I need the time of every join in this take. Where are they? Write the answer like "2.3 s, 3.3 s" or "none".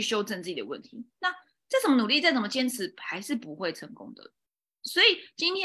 none